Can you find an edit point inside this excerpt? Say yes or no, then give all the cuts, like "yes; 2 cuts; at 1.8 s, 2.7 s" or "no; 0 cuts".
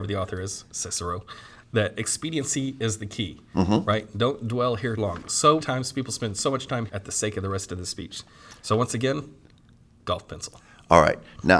yes; 4 cuts; at 1.6 s, 5.0 s, 5.6 s, 6.9 s